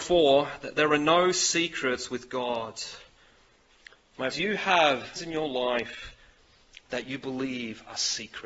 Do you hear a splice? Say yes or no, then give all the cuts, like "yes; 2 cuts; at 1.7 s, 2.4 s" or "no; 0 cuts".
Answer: yes; 2 cuts; at 4.3 s, 5.2 s